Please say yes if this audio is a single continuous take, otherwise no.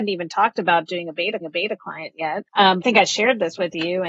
no